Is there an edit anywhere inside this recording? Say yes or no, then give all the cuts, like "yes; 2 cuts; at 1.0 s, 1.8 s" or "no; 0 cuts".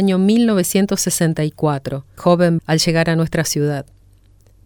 yes; 2 cuts; at 2.2 s, 2.6 s